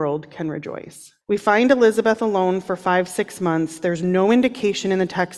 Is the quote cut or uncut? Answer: cut